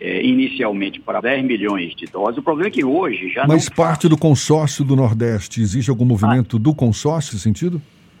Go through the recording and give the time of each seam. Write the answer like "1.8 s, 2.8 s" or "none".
1.2 s, 3.7 s, 7.3 s